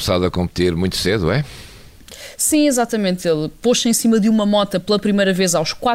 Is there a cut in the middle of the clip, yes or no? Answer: no